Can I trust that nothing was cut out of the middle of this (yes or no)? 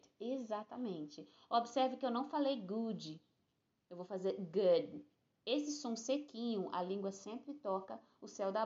yes